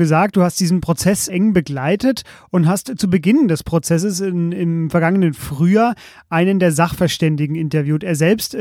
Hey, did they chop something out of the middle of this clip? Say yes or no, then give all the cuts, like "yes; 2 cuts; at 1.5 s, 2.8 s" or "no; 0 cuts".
yes; 1 cut; at 1.3 s